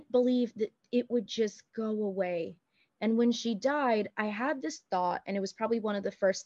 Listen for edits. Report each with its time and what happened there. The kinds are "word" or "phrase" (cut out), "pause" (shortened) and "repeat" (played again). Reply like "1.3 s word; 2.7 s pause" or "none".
none